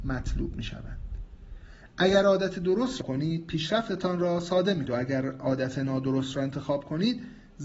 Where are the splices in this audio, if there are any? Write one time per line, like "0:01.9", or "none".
0:03.0
0:04.9

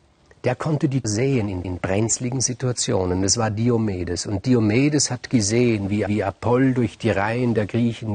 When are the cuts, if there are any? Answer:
0:01.0
0:01.6
0:06.1

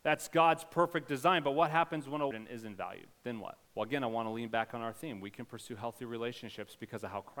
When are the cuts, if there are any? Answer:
0:02.3
0:03.6

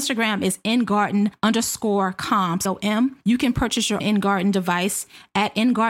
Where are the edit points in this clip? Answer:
0:02.7
0:04.0

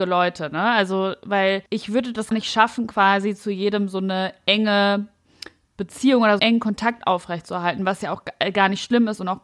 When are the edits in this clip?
0:01.7
0:02.3
0:06.4

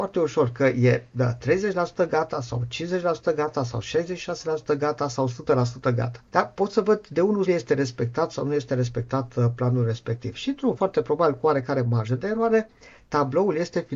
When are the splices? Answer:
0:06.3
0:07.4
0:10.8

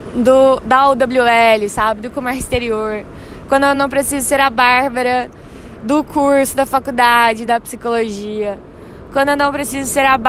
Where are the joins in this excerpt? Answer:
none

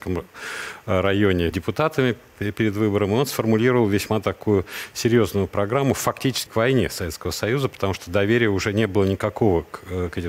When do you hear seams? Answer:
0:01.5
0:06.5

